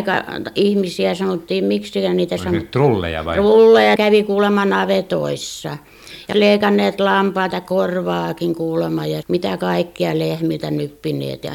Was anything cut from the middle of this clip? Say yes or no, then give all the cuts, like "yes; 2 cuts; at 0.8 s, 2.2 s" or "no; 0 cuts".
yes; 3 cuts; at 4.0 s, 6.3 s, 9.2 s